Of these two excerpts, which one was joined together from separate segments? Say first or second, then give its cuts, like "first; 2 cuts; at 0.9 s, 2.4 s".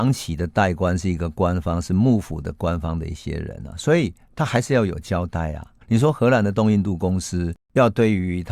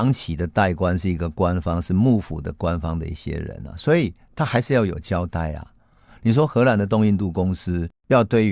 first; 1 cut; at 5.8 s